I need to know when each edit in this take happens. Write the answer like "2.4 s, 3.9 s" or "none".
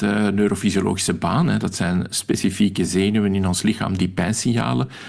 none